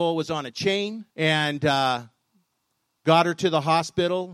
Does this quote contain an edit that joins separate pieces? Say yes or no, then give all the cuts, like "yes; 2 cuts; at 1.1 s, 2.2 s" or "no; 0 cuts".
yes; 1 cut; at 1.1 s